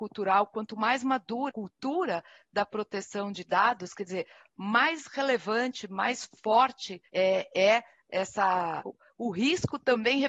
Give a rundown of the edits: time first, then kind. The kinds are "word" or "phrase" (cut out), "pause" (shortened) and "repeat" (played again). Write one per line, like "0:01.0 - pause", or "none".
0:01.5 - word
0:07.1 - word
0:08.8 - word